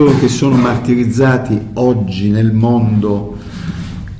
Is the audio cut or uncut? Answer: uncut